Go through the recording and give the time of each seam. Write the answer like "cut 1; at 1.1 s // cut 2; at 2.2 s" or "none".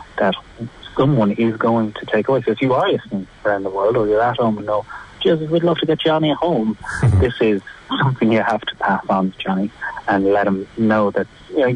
cut 1; at 4.6 s